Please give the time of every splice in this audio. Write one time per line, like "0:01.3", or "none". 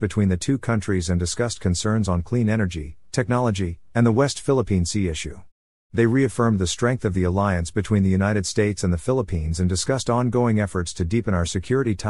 none